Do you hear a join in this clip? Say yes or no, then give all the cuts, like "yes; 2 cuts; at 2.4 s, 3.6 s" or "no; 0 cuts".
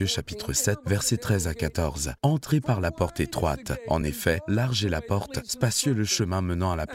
no; 0 cuts